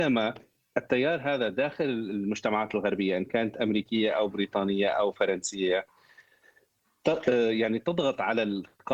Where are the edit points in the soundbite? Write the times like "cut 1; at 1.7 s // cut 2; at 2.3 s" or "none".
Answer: none

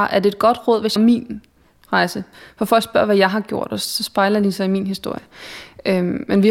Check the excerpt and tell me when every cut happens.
cut 1; at 1.0 s

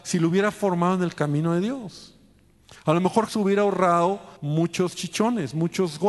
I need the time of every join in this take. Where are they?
cut 1; at 3.3 s // cut 2; at 4.4 s

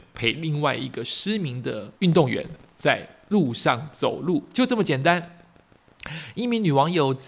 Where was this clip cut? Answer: cut 1; at 1.9 s

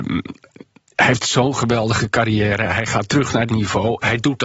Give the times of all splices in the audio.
cut 1; at 3.5 s

